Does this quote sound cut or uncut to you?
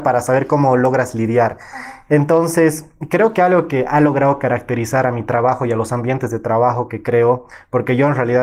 uncut